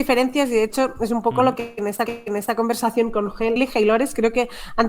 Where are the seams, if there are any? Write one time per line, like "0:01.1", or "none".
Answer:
0:02.1
0:03.6